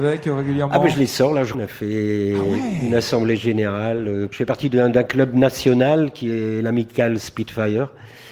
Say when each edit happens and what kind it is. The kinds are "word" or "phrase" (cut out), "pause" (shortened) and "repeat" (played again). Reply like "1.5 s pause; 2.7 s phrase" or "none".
1.5 s phrase